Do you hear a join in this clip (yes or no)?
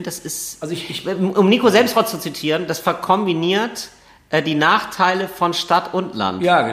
no